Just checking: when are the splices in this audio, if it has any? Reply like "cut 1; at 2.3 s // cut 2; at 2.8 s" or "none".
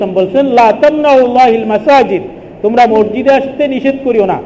cut 1; at 1.2 s // cut 2; at 2.9 s

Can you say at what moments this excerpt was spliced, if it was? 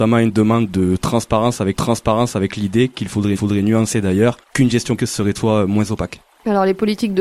cut 1; at 1.7 s // cut 2; at 3.4 s // cut 3; at 4.4 s // cut 4; at 5.0 s // cut 5; at 5.3 s

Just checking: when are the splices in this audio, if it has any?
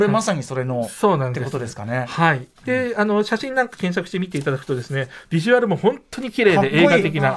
cut 1; at 2.6 s

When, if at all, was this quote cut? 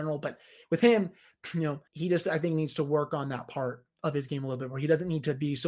cut 1; at 1.9 s

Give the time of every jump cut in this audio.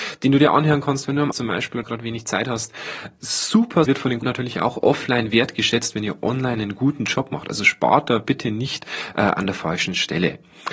cut 1; at 1.3 s // cut 2; at 1.8 s // cut 3; at 3.8 s // cut 4; at 4.2 s

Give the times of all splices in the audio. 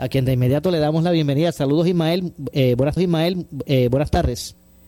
cut 1; at 3.0 s

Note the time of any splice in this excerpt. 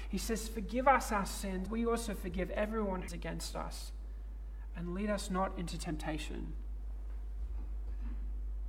cut 1; at 1.7 s // cut 2; at 3.1 s

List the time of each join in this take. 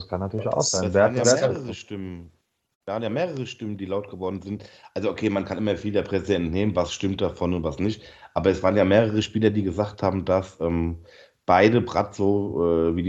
none

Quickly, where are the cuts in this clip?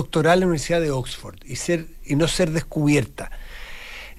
none

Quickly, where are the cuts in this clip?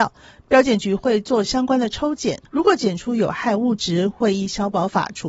cut 1; at 2.5 s

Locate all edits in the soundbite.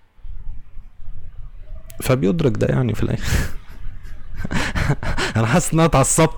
none

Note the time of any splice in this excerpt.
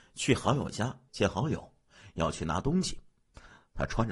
cut 1; at 1.1 s

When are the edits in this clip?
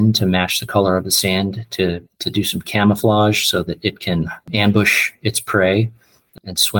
cut 1; at 2.1 s // cut 2; at 4.4 s

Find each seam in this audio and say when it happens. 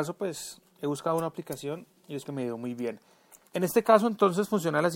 cut 1; at 2.2 s // cut 2; at 3.5 s

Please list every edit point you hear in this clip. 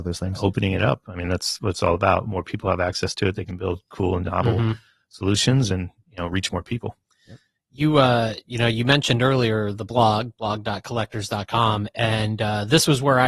none

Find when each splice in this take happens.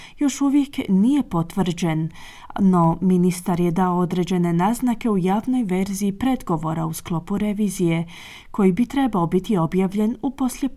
none

